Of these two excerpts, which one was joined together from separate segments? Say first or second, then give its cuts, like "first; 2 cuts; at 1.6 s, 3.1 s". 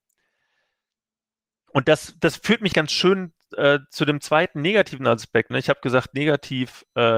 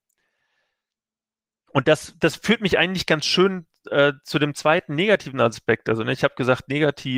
first; 2 cuts; at 2.7 s, 5.5 s